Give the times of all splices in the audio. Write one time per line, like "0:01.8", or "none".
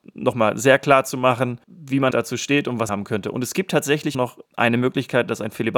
0:01.6
0:02.1
0:02.9
0:04.1
0:04.4